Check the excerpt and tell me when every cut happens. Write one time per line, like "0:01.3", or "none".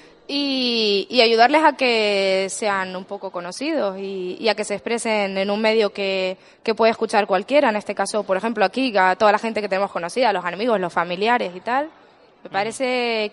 none